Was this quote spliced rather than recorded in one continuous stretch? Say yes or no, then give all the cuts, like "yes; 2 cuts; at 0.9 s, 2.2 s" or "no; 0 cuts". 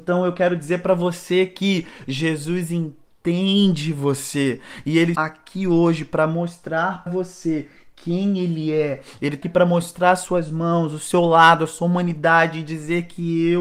yes; 3 cuts; at 5.1 s, 7.1 s, 9.4 s